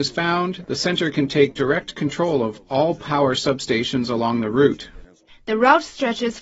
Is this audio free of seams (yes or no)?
yes